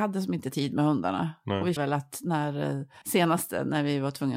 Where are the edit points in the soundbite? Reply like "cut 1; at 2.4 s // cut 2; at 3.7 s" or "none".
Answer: cut 1; at 1.8 s // cut 2; at 3.0 s